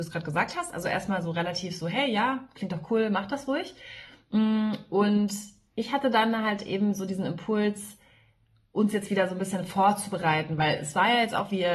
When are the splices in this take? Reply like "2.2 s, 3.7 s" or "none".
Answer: none